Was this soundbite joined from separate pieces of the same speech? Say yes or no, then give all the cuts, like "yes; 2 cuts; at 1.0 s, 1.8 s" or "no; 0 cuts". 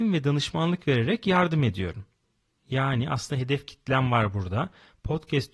no; 0 cuts